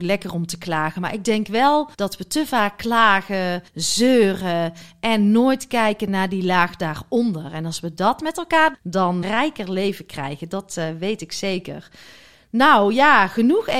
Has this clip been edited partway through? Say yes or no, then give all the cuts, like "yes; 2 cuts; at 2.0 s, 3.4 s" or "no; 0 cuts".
yes; 4 cuts; at 1.9 s, 3.7 s, 8.7 s, 9.2 s